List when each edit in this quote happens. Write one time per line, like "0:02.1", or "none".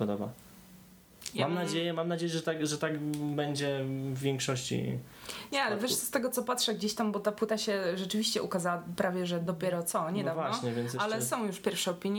none

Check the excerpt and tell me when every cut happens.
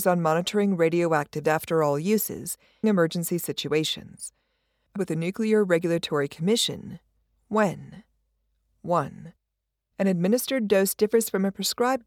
0:01.4
0:02.8
0:05.0

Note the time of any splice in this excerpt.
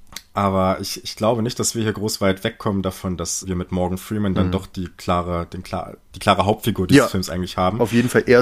0:03.4

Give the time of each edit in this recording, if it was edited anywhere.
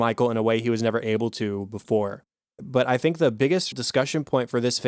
0:02.4
0:03.7

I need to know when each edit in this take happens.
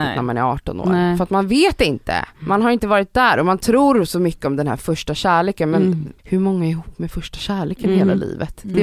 0:06.2

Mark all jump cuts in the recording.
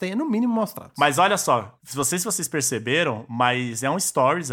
none

